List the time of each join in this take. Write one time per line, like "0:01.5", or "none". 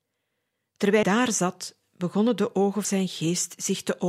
0:01.0
0:02.8